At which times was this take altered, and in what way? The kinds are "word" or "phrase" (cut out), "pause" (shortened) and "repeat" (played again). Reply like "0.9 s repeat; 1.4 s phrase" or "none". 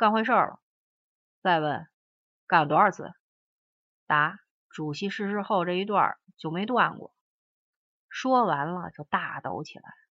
1.9 s pause; 4.5 s pause